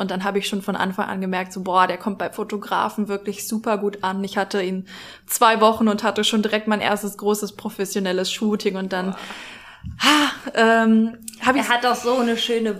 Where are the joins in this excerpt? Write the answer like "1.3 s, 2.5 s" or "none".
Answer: none